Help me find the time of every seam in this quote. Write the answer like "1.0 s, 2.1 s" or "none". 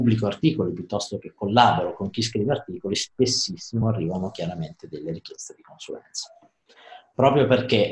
none